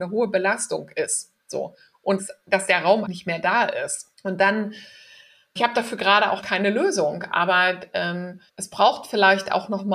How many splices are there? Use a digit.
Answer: 7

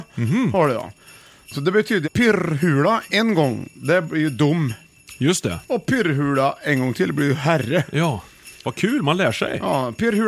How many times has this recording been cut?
1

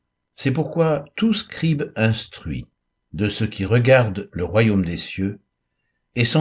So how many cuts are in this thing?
0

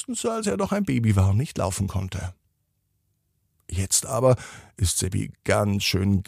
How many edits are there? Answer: 0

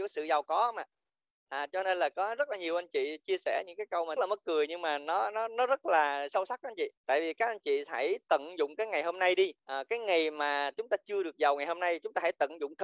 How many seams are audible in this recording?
3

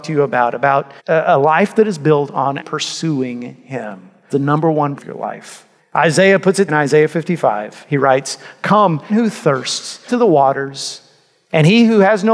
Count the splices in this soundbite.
8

